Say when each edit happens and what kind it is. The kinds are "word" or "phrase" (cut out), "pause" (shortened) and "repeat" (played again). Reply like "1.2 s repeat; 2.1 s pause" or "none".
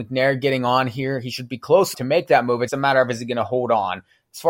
1.9 s word; 2.7 s word